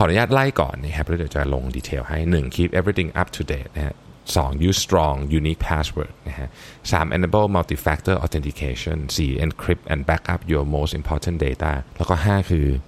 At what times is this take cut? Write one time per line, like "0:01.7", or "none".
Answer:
0:11.9